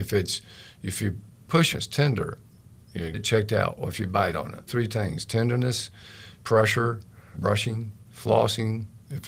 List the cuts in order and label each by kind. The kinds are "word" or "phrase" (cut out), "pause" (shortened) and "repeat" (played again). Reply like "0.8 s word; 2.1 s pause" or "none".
1.7 s word; 3.1 s word; 4.7 s word; 6.4 s word; 7.3 s word